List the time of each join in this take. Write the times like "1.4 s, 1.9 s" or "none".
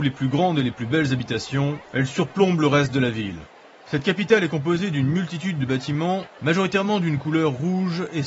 1.8 s